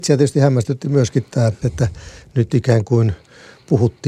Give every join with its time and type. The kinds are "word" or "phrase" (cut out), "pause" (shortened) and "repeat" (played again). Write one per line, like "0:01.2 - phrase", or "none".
0:01.6 - phrase